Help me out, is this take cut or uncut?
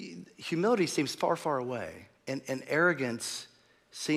cut